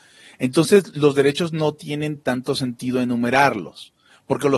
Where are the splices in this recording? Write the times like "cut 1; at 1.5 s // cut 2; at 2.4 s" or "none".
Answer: none